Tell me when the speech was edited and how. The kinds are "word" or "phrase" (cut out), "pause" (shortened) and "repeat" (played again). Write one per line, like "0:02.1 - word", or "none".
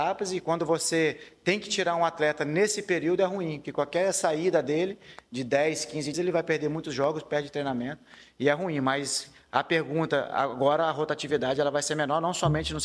0:06.1 - word